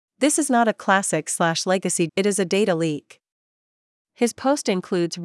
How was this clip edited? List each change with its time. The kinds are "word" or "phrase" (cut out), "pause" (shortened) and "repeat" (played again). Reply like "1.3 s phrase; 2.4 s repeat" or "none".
2.1 s phrase; 3.5 s pause